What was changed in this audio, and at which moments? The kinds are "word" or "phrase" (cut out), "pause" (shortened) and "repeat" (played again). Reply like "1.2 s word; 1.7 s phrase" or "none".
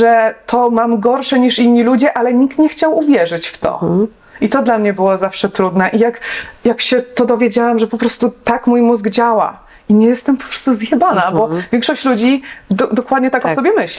none